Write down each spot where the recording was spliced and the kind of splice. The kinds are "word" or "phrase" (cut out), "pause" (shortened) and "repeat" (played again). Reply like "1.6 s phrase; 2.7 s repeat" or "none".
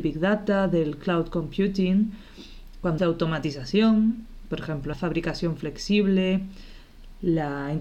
3.0 s word; 4.9 s phrase